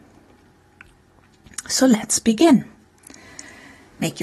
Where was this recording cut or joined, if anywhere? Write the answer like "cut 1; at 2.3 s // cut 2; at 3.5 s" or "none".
none